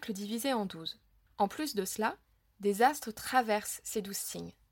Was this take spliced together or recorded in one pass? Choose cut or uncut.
uncut